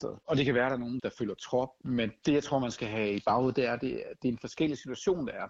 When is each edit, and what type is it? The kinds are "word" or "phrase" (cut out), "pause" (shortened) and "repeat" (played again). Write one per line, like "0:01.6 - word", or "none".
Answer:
0:01.0 - word